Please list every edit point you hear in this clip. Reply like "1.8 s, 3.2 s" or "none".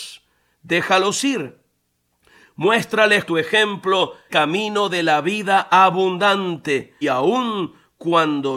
3.3 s, 4.3 s, 7.0 s